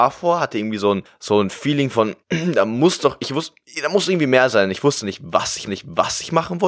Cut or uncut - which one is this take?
cut